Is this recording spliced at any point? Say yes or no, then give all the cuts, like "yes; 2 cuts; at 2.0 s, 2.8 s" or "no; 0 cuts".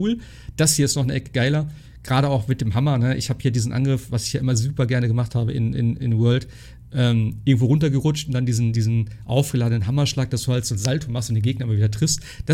no; 0 cuts